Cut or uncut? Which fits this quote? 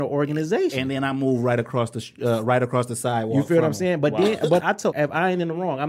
cut